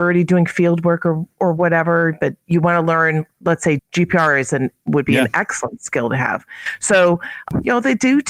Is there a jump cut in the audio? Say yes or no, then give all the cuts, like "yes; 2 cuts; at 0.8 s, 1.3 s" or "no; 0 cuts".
yes; 2 cuts; at 2.5 s, 3.8 s